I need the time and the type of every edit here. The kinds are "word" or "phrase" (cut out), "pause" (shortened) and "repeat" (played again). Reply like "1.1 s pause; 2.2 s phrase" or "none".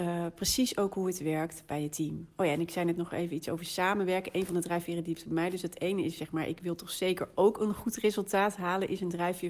none